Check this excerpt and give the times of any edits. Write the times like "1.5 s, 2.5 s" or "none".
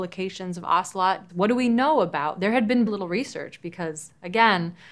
1.3 s, 2.9 s